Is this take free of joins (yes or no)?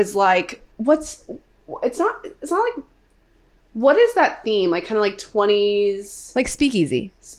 yes